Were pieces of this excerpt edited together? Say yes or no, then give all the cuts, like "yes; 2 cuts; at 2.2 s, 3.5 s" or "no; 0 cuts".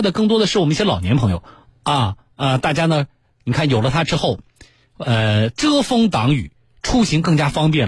no; 0 cuts